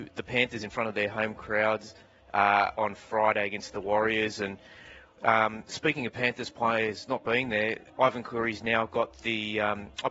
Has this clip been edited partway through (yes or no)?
no